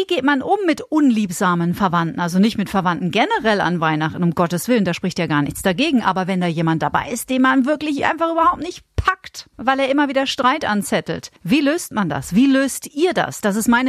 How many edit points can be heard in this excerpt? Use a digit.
2